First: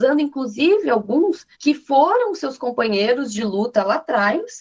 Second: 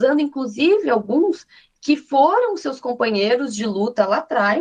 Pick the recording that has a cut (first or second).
first